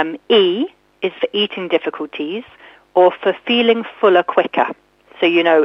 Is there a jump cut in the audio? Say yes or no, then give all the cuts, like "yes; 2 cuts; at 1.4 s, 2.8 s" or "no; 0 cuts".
no; 0 cuts